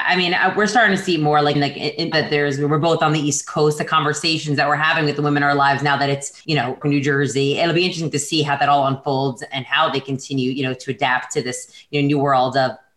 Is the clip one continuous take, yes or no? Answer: no